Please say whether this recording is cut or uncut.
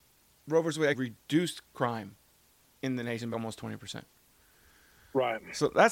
cut